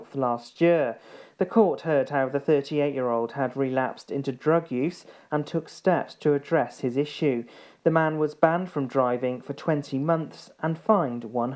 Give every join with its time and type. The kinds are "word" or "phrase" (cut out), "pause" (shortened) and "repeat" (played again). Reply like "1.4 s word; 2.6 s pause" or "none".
none